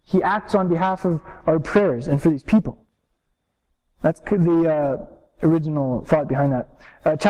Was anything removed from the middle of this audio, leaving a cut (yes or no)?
no